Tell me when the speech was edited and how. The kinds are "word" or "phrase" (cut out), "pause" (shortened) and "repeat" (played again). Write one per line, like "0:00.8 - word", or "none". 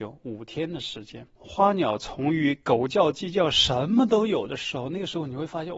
0:01.3 - pause